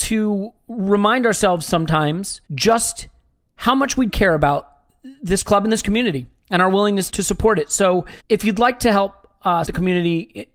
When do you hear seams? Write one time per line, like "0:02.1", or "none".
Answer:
0:02.5
0:04.1
0:07.1
0:08.2
0:09.6